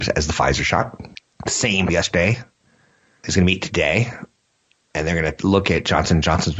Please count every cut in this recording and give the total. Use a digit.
3